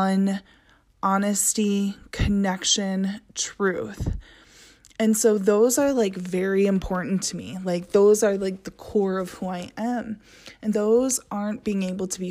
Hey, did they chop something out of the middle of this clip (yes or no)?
yes